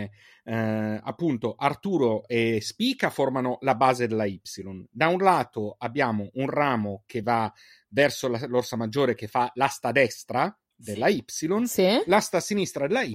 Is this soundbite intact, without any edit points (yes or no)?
yes